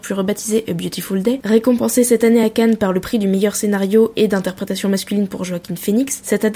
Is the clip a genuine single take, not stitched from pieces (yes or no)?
yes